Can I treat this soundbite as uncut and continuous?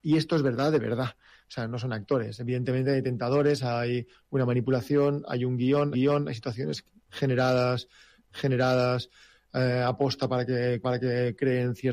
no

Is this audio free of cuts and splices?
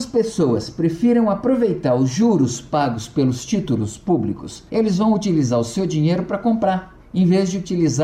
no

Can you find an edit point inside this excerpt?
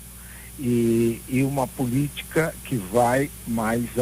no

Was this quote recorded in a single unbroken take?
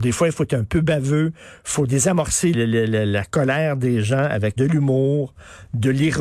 no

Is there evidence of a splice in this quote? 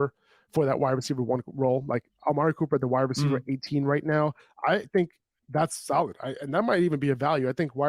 no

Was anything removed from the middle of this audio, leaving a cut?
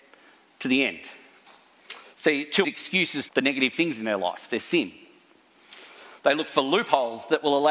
yes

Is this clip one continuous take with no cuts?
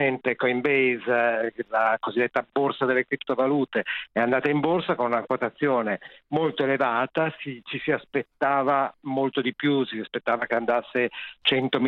yes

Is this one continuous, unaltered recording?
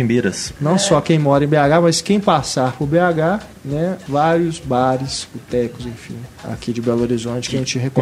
no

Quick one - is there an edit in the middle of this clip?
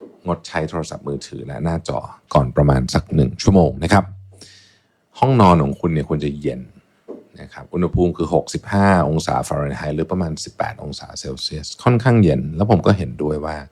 no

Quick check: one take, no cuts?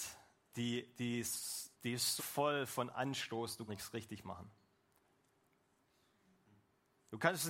no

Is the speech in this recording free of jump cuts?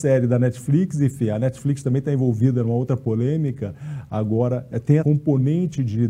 no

